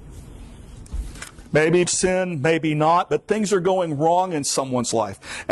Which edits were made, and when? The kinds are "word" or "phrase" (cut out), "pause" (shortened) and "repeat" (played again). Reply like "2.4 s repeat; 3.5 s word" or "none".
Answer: 1.8 s phrase